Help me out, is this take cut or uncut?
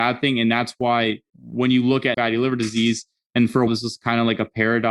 cut